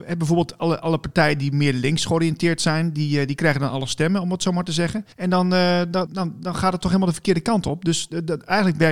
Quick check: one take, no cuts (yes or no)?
no